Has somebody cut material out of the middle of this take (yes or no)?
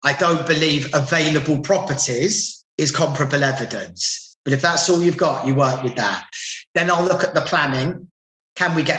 yes